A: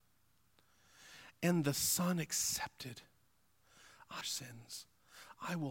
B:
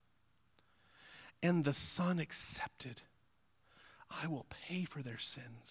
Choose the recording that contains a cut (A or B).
A